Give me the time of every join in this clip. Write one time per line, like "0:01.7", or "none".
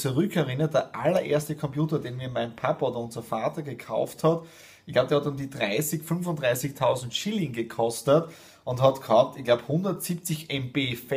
none